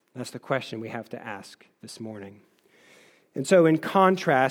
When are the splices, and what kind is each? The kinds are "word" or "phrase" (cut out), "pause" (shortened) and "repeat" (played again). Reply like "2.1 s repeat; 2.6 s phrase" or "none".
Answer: none